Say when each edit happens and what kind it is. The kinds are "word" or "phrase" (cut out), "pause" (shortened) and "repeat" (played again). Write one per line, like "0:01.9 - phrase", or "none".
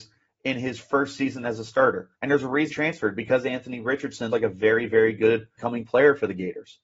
0:02.1 - pause
0:02.7 - word
0:04.3 - word
0:05.6 - phrase